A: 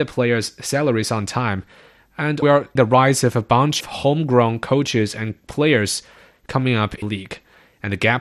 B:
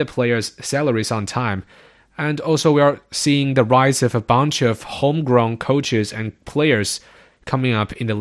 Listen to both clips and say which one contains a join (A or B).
A